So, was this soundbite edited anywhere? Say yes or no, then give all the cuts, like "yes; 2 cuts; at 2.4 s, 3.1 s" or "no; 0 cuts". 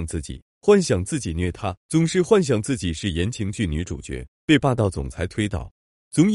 yes; 1 cut; at 1.8 s